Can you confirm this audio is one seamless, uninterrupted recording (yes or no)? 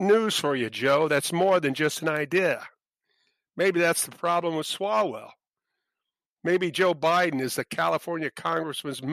yes